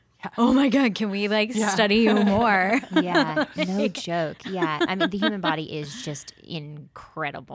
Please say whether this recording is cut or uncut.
uncut